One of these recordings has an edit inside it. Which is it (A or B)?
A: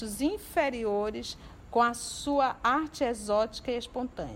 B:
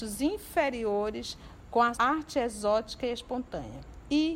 B